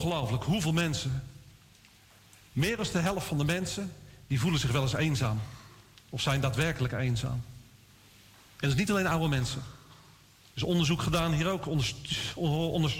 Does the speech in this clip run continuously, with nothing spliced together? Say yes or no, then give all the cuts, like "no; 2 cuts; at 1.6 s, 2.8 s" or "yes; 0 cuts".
yes; 0 cuts